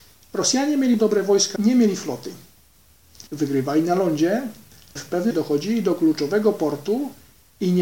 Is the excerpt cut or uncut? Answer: cut